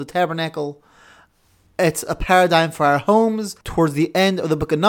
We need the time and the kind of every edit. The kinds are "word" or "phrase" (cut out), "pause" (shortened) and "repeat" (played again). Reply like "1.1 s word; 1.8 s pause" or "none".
3.6 s pause